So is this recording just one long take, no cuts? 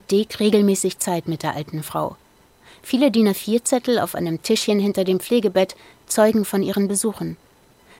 yes; 0 cuts

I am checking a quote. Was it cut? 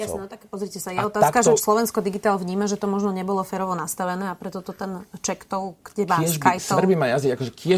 yes; 1 cut; at 1.6 s

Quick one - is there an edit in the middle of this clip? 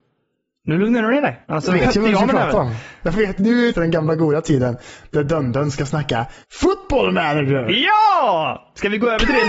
yes; 4 cuts; at 1.4 s, 3.4 s, 3.7 s, 6.4 s

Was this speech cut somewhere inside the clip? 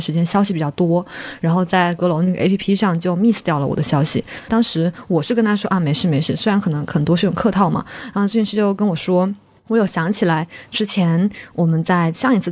no; 0 cuts

